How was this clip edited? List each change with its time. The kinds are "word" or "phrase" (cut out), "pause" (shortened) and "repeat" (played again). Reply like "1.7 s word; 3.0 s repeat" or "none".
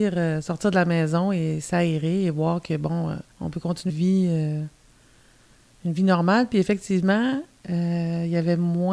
3.3 s pause; 3.9 s word